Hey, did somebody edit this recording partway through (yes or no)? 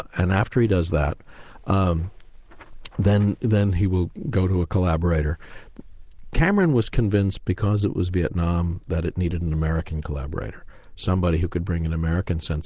no